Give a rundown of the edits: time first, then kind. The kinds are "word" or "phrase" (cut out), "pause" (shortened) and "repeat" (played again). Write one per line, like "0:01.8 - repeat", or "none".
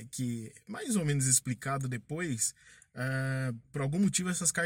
none